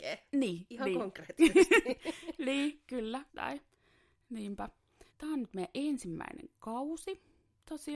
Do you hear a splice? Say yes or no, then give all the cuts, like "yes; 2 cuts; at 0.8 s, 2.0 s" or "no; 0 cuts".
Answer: yes; 2 cuts; at 3.3 s, 5.1 s